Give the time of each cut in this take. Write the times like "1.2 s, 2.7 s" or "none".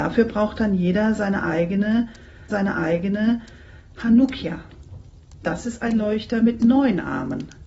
2.5 s